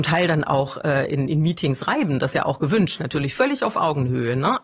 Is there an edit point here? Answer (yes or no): yes